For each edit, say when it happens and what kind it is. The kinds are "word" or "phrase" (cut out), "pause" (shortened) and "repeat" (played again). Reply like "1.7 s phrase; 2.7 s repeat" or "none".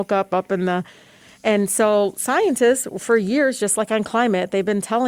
none